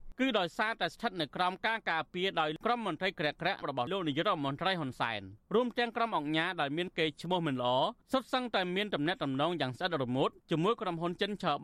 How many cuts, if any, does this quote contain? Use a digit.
2